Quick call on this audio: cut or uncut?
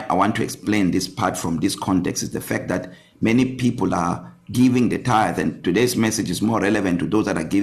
uncut